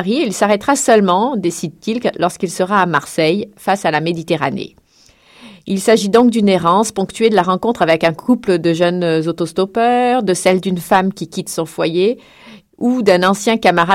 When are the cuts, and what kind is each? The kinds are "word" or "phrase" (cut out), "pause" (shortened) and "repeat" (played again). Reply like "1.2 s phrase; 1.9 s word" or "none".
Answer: none